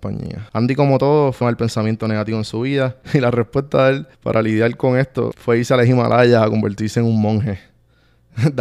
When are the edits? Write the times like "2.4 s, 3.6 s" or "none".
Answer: 1.4 s, 3.0 s, 4.1 s